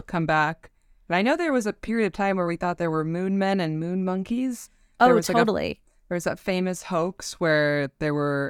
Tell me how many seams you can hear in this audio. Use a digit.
0